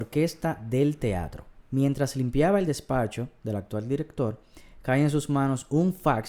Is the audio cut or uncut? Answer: uncut